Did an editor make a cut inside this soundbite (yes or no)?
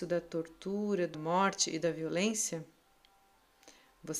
yes